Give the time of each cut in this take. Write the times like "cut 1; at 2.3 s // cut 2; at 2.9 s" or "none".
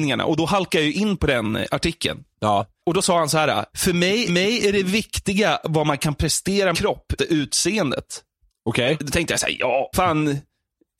cut 1; at 2.3 s // cut 2; at 3.7 s // cut 3; at 4.3 s // cut 4; at 6.7 s // cut 5; at 7.2 s // cut 6; at 9.9 s